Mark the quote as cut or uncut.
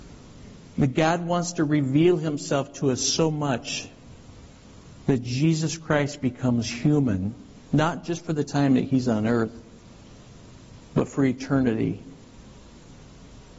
uncut